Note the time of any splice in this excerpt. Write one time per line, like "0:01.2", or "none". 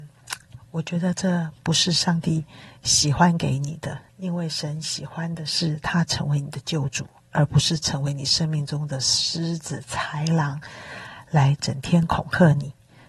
0:04.1